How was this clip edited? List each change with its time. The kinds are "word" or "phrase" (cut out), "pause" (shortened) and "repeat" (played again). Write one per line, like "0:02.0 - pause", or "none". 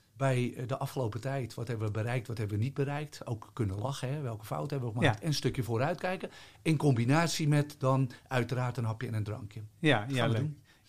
none